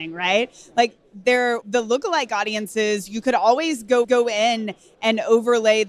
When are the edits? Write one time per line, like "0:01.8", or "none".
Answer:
0:01.6
0:04.0